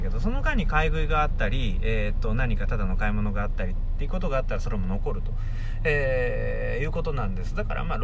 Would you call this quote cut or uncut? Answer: uncut